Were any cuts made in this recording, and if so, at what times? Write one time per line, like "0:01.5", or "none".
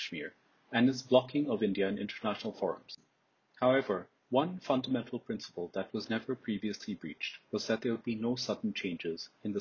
none